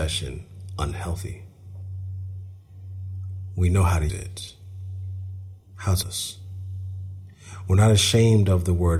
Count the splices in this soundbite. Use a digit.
2